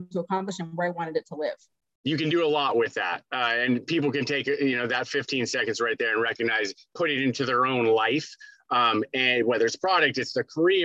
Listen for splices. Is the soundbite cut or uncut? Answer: uncut